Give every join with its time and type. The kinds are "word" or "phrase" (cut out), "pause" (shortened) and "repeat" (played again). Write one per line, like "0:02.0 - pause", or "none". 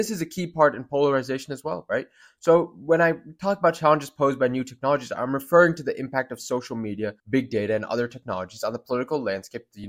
0:07.2 - pause

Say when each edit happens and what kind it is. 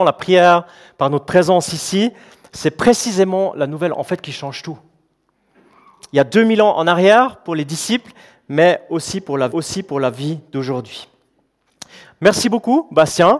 0:09.5 - repeat

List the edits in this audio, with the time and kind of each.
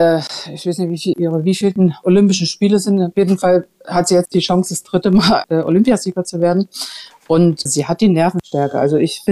0:01.1 - word
0:05.4 - word
0:07.7 - word

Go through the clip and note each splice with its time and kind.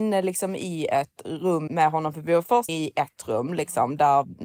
0:02.7 - word

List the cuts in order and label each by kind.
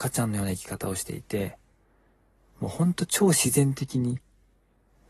none

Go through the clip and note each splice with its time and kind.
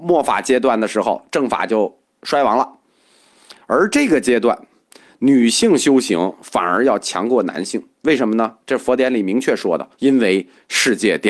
0:07.9 - pause
0:09.9 - pause

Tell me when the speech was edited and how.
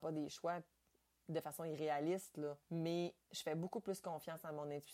0:02.6 - pause

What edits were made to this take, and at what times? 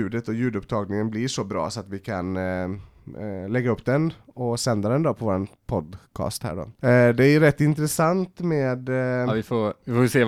none

